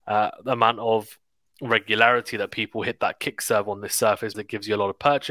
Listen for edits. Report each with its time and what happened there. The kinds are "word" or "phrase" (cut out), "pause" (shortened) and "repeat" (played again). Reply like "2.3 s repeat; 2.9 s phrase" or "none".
4.3 s word